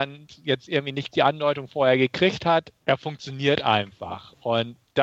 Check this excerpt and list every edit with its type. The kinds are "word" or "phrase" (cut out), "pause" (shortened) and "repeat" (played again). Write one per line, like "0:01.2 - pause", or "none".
0:01.1 - word
0:02.8 - pause